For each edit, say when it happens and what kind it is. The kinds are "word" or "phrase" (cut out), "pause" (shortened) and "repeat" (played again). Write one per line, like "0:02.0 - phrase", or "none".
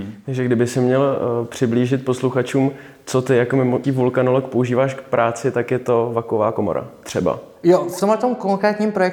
0:03.8 - word